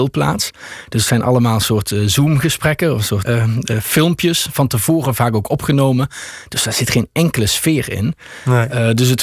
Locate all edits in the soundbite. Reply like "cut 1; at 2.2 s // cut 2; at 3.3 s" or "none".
cut 1; at 3.2 s

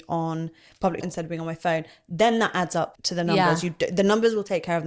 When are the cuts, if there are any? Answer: cut 1; at 1.0 s // cut 2; at 2.9 s

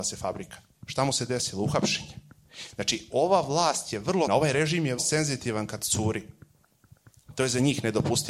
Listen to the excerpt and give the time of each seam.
cut 1; at 4.3 s // cut 2; at 5.0 s

